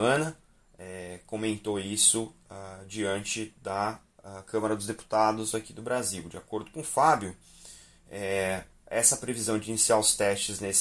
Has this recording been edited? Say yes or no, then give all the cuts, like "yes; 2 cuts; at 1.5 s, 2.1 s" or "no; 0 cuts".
no; 0 cuts